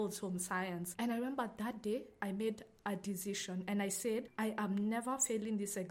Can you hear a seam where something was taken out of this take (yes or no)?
no